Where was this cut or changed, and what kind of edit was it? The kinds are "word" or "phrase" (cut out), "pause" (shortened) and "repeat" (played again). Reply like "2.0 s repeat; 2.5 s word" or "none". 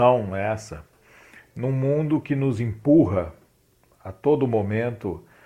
none